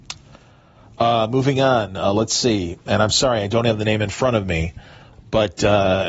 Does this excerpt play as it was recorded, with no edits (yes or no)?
yes